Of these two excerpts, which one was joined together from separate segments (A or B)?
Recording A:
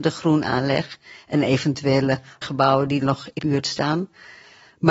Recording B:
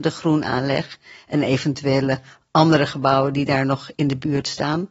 A